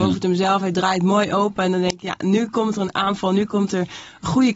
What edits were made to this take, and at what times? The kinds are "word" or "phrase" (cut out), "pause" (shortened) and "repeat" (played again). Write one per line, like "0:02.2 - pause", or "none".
none

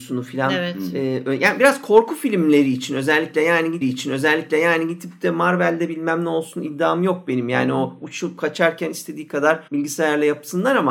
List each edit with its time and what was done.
0:03.8 - repeat
0:09.7 - pause

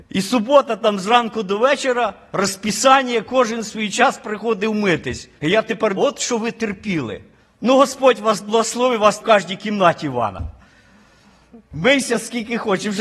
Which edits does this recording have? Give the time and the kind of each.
0:05.4 - pause
0:06.0 - phrase
0:07.4 - pause
0:09.2 - word

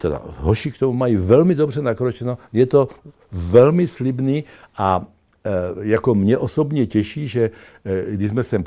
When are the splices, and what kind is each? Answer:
none

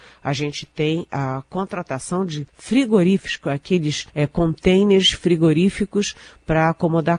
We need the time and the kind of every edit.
0:02.5 - pause
0:04.1 - pause

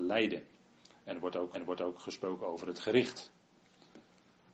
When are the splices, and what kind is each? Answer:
0:01.5 - repeat

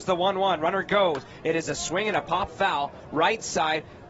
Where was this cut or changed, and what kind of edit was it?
0:02.5 - word

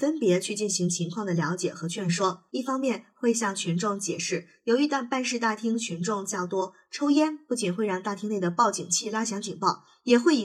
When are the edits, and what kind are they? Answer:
0:02.5 - pause

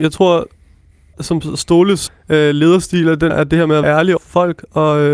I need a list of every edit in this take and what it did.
0:01.1 - word
0:02.1 - word
0:03.3 - word
0:03.8 - word
0:04.2 - word

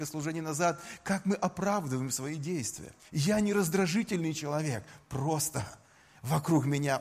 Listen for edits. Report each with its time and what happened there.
0:03.0 - pause

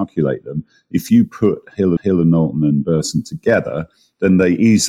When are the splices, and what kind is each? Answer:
0:02.0 - repeat

